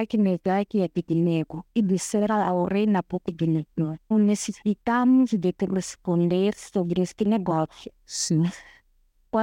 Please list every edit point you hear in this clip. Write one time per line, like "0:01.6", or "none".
0:04.1